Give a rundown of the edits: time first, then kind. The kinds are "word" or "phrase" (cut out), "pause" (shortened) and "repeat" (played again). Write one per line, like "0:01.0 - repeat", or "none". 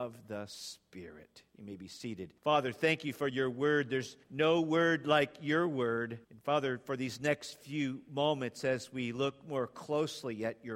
0:02.4 - pause
0:04.2 - pause
0:06.2 - pause